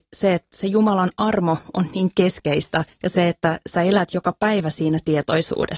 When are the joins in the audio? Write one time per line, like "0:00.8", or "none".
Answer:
0:02.9